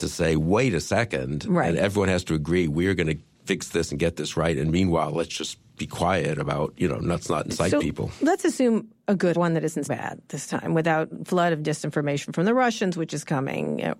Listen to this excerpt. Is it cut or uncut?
cut